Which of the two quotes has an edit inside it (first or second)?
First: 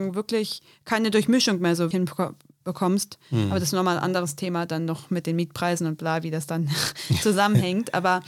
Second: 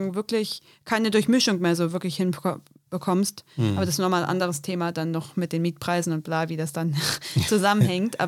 first